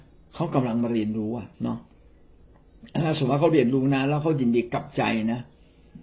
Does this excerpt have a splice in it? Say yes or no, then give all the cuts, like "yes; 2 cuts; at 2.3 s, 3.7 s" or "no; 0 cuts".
yes; 1 cut; at 1.5 s